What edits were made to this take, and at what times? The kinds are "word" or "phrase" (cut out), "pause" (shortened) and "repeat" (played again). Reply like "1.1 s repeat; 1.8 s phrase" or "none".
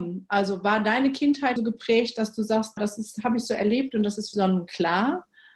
1.6 s word; 2.8 s word; 4.3 s word